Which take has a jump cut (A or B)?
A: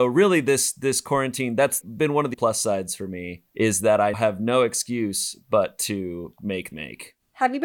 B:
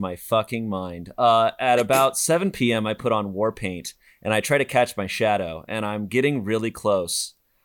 A